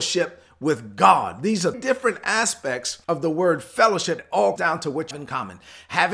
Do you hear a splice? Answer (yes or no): yes